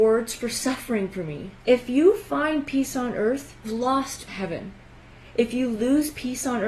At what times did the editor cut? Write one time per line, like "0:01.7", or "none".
0:01.6
0:03.6
0:04.3